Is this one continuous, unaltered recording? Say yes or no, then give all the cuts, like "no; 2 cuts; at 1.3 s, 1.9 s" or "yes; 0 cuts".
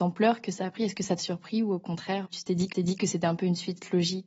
no; 3 cuts; at 1.2 s, 2.2 s, 2.7 s